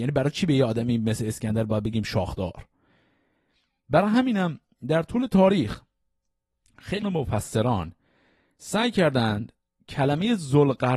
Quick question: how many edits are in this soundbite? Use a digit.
1